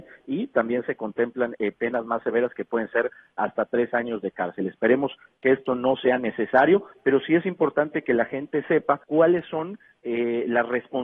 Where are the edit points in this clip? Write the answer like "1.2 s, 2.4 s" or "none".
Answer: 9.0 s